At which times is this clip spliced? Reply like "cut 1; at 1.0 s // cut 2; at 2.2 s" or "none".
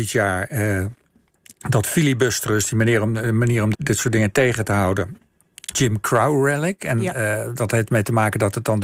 cut 1; at 3.7 s // cut 2; at 5.7 s